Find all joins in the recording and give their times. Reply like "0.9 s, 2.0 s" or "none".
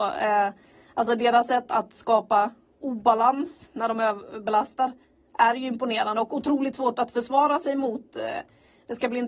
none